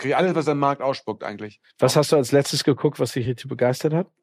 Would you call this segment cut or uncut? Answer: uncut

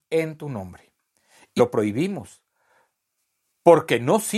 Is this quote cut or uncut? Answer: cut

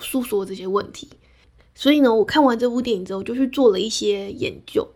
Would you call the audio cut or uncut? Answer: uncut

